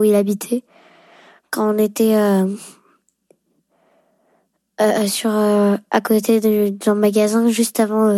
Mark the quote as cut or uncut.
uncut